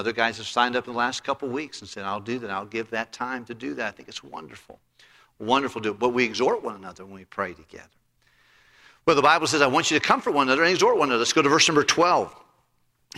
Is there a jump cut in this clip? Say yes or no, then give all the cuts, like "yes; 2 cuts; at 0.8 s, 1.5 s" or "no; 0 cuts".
no; 0 cuts